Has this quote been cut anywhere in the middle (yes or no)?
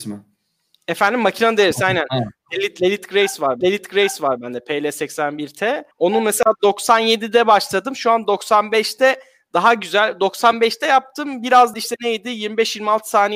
yes